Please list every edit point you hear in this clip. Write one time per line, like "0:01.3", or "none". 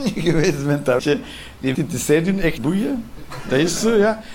0:01.0
0:01.7
0:02.6